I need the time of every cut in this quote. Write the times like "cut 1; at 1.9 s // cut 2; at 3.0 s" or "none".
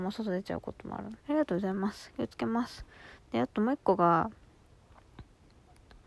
cut 1; at 1.2 s